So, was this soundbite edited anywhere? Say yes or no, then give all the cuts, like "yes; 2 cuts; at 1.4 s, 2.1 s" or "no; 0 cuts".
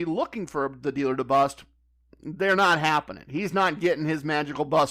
no; 0 cuts